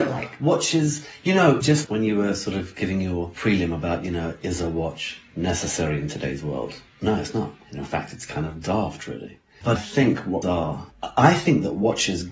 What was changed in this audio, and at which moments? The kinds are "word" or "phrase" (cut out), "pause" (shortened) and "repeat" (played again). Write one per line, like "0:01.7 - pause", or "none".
0:01.8 - word
0:09.8 - word
0:10.4 - word